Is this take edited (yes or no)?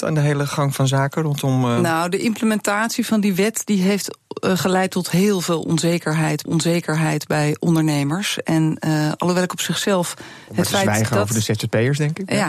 yes